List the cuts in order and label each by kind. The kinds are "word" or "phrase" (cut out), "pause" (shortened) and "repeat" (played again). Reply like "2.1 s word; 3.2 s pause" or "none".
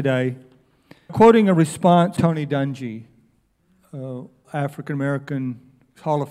1.1 s word; 2.2 s word; 4.4 s word